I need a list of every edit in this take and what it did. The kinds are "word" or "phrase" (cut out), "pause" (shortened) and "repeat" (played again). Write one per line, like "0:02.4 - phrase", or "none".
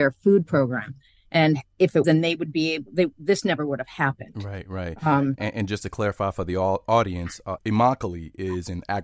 0:02.0 - word
0:07.6 - word